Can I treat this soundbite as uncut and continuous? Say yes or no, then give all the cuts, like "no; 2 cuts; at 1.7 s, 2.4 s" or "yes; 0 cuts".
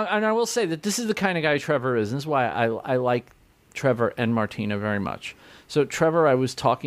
yes; 0 cuts